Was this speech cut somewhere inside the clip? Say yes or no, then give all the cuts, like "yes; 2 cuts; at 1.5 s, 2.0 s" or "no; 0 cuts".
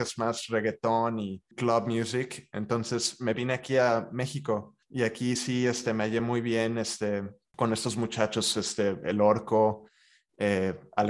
no; 0 cuts